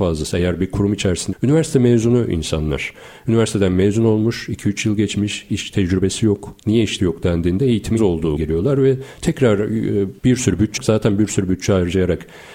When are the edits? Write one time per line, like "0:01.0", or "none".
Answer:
0:01.3
0:05.5
0:06.6
0:07.0
0:08.0
0:08.4
0:10.2
0:10.8

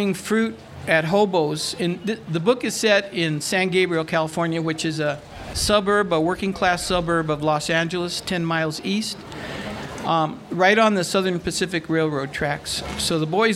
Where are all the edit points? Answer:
none

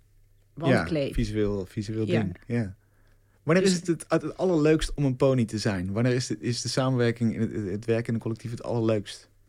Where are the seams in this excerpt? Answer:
none

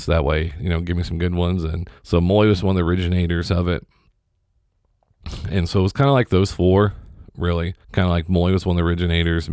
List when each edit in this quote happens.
0:02.0
0:07.8

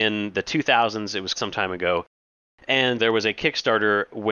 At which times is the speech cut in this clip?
0:01.3
0:03.0

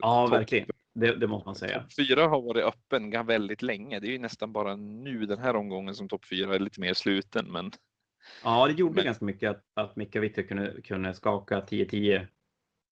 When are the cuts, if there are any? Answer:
0:09.7

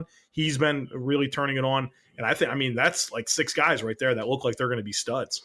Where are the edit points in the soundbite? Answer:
none

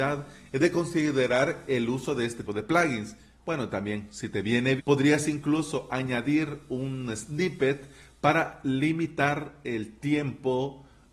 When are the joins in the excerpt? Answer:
0:02.5
0:04.8

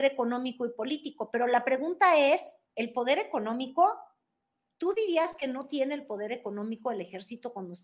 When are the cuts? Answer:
none

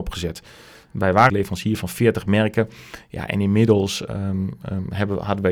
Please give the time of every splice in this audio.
0:01.3
0:04.1

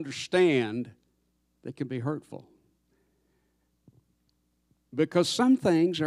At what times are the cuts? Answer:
none

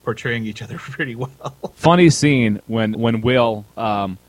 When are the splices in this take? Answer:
0:02.9

